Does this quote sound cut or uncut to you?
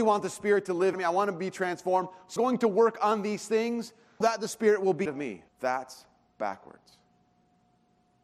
cut